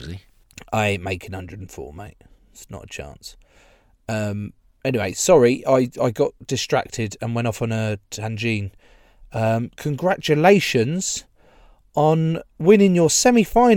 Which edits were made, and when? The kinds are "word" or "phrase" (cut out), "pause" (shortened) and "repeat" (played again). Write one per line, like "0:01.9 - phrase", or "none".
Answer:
none

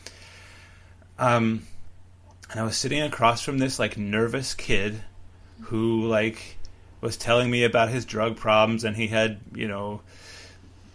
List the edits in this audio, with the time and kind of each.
none

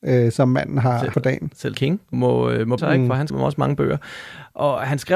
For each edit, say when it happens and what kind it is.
0:01.1 - phrase
0:01.7 - word
0:02.1 - word
0:02.8 - word
0:03.3 - word

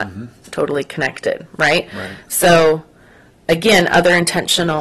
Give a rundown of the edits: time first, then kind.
0:03.4 - word

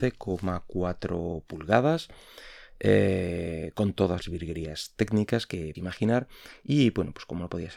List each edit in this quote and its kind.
0:04.2 - word
0:05.7 - word

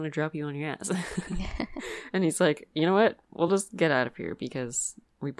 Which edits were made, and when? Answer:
none

